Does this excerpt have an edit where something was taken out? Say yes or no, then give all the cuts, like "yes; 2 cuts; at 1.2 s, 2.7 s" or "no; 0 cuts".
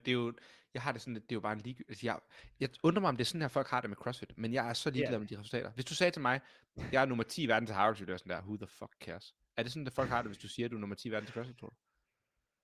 no; 0 cuts